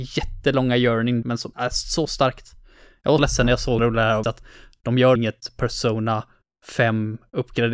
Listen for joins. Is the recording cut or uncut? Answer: cut